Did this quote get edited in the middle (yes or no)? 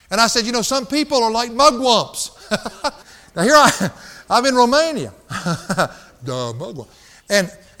yes